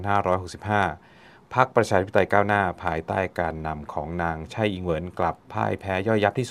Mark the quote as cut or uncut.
uncut